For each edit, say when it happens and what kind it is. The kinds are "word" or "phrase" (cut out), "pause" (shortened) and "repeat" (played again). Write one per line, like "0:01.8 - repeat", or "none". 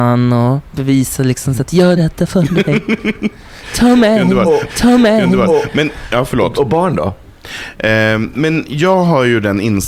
0:02.0 - word
0:04.7 - repeat